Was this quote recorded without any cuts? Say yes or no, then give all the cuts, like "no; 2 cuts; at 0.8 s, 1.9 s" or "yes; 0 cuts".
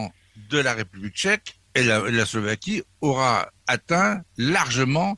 no; 2 cuts; at 1.7 s, 3.6 s